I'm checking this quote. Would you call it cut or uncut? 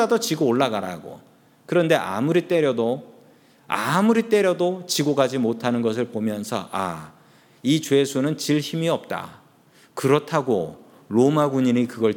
uncut